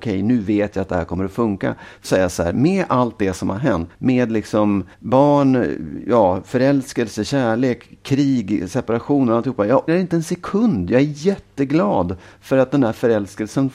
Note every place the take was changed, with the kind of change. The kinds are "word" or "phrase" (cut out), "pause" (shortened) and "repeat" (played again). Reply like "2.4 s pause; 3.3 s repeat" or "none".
2.0 s phrase; 3.9 s word; 4.9 s pause; 9.9 s word

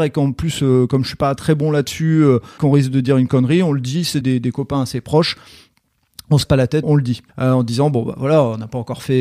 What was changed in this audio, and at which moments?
1.4 s word; 2.6 s word; 4.2 s word; 6.4 s word; 6.8 s word; 7.3 s pause

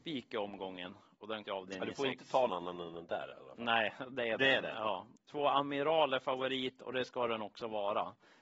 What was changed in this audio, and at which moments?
1.4 s phrase; 2.5 s word

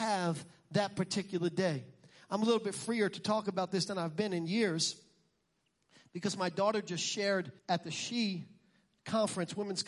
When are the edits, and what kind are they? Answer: 7.6 s pause

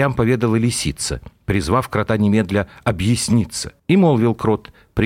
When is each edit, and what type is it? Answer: 3.8 s pause

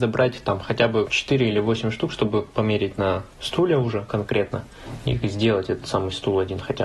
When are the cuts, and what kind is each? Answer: 1.0 s word

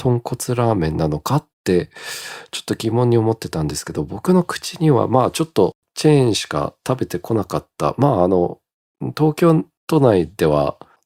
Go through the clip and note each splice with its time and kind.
1.5 s pause

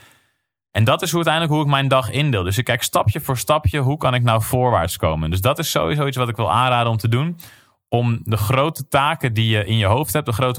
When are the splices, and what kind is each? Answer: none

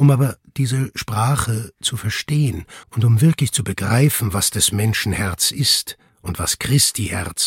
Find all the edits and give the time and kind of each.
2.8 s pause

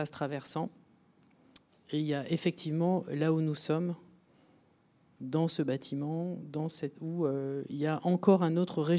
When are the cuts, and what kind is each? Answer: 7.0 s word

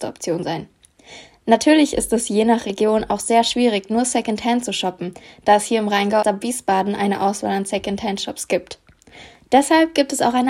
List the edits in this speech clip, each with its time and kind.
6.2 s word

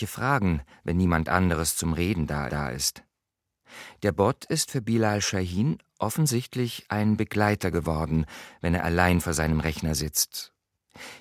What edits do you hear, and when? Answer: 2.5 s repeat

